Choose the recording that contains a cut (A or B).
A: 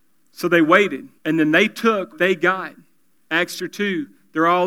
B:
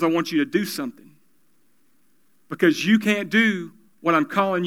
A